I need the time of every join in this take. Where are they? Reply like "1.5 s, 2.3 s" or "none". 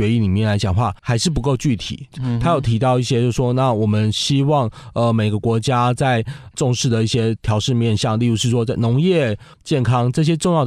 1.0 s, 9.5 s